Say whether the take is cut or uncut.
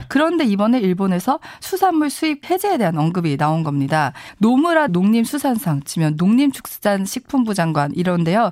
cut